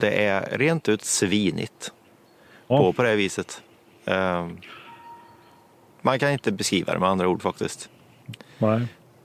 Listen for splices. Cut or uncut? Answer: cut